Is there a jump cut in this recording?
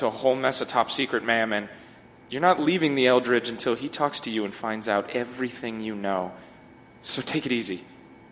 no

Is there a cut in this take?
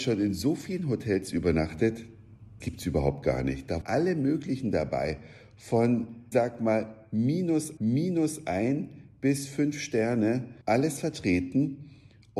yes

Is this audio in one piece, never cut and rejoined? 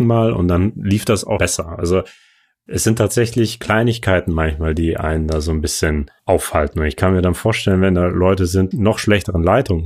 no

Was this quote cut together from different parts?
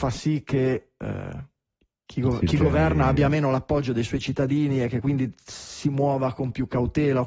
no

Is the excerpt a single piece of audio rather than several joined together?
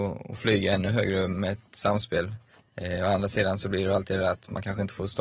no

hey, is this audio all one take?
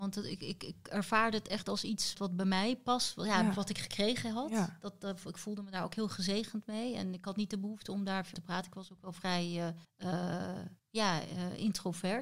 no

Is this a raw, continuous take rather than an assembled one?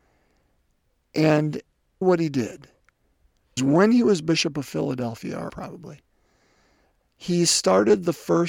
no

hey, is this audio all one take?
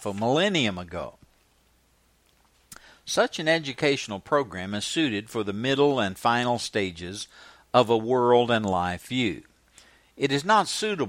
yes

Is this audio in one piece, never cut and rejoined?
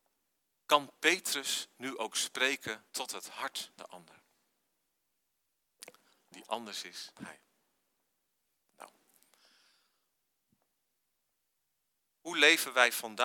no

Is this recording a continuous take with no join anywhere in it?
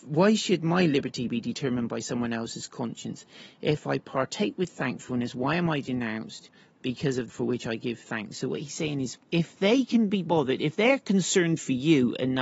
no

